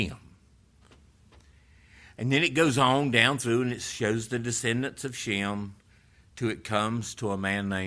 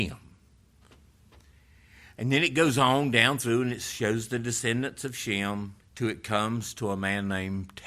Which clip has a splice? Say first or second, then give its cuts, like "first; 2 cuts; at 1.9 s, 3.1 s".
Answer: second; 1 cut; at 5.8 s